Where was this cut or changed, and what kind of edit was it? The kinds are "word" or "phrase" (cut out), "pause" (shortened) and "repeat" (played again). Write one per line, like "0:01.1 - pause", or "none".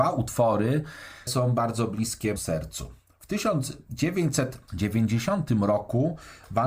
0:01.3 - word
0:02.4 - word